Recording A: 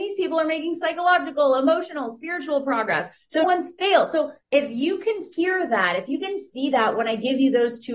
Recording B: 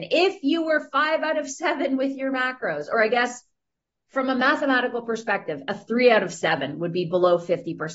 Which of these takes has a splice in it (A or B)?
A